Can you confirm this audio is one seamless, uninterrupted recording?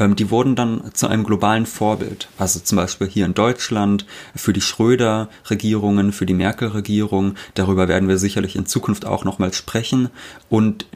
yes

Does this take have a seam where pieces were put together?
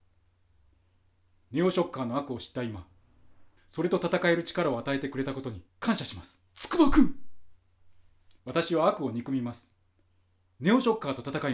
yes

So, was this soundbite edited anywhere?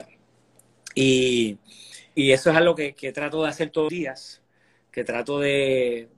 yes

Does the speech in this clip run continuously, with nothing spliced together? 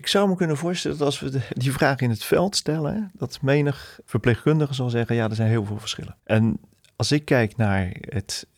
no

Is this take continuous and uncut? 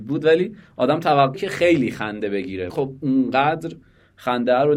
no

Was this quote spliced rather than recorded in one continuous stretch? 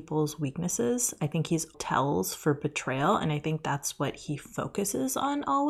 yes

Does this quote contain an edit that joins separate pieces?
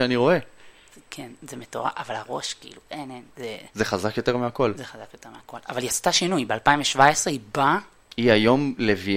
no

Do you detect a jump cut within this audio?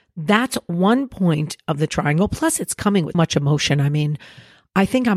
yes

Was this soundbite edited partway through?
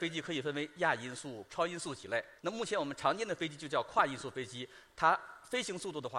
yes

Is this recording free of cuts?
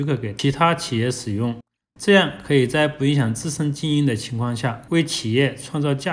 yes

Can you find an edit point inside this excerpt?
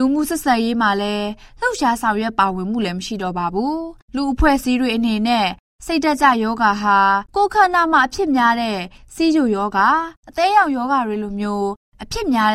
yes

